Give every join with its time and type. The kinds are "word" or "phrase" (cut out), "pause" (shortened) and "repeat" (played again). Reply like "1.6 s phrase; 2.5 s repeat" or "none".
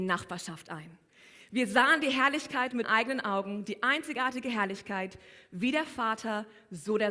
2.8 s word